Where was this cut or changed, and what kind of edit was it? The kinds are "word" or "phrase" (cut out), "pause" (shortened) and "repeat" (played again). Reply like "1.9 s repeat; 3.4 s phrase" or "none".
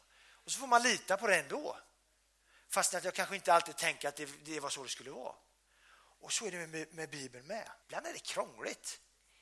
7.8 s pause

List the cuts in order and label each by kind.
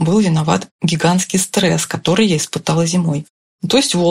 none

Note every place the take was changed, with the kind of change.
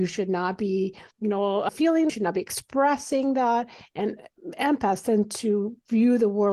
1.1 s pause; 2.1 s phrase

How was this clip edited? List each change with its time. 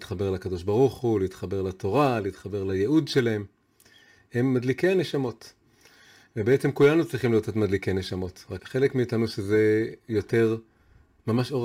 8.6 s word

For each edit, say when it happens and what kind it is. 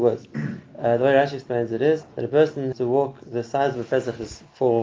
2.1 s pause; 2.7 s word

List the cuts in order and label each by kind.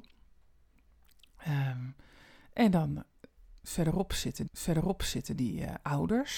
4.5 s repeat

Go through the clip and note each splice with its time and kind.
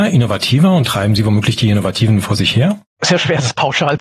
2.9 s pause

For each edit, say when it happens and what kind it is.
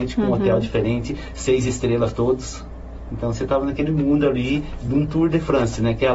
none

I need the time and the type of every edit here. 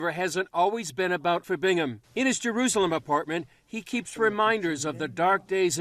1.4 s word; 2.0 s pause

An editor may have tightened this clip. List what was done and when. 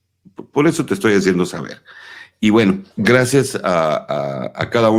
2.9 s pause

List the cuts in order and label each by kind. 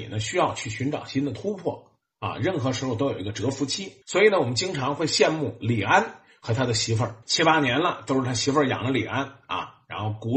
4.0 s pause; 7.2 s pause

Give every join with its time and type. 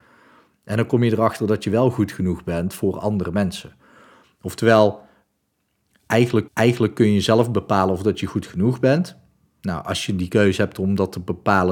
6.5 s repeat

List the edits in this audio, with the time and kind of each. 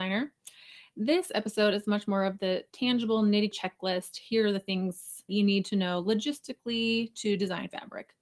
3.5 s word; 5.3 s word

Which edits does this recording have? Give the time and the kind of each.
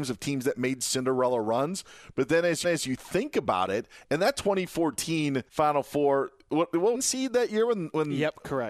2.6 s repeat; 5.5 s pause; 6.9 s phrase

